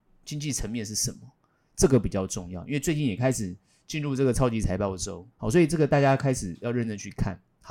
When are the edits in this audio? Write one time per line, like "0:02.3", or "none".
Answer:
0:05.3